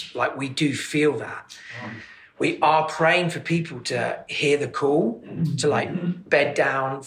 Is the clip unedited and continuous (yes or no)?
yes